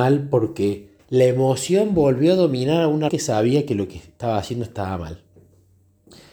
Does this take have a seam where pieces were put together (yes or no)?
yes